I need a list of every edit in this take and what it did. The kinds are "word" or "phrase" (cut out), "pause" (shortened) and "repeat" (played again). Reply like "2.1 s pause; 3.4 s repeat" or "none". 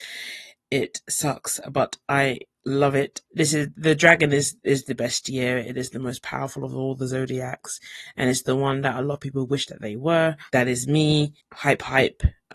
3.2 s pause; 10.5 s pause; 11.4 s pause